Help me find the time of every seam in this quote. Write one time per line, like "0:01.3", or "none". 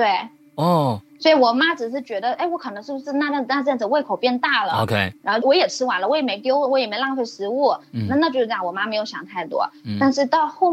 0:05.4